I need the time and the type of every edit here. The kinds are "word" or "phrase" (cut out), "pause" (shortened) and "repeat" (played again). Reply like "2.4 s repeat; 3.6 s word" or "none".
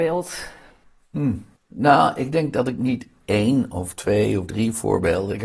1.6 s pause